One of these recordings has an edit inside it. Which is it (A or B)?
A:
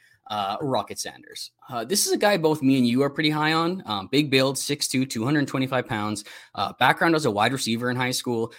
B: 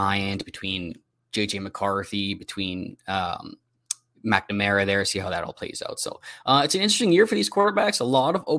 A